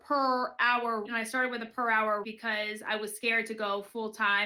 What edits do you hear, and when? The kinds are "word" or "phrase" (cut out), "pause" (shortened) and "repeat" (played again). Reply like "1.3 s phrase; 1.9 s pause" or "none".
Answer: 1.1 s word; 2.2 s word